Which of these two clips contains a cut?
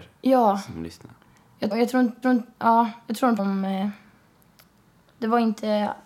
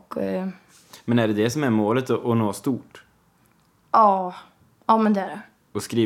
first; 3 cuts; at 1.7 s, 2.2 s, 3.4 s

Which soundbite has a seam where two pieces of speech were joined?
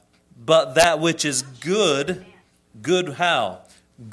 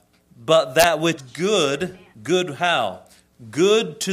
second; 2 cuts; at 1.2 s, 2.1 s

